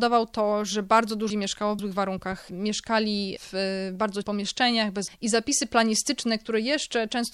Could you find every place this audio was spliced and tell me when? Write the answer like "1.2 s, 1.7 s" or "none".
1.3 s, 1.8 s, 4.2 s, 5.1 s